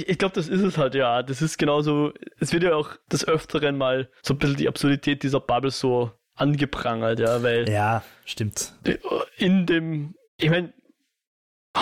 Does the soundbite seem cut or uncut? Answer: cut